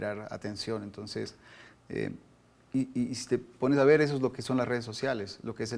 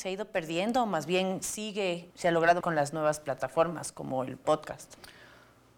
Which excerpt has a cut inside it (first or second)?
second